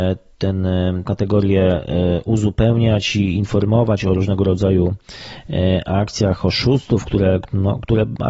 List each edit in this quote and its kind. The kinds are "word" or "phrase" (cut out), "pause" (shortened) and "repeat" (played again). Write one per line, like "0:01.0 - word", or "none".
0:01.0 - word